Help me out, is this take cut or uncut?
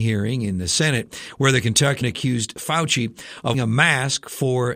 cut